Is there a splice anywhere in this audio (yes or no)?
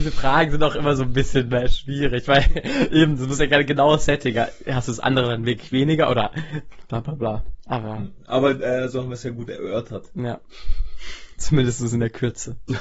no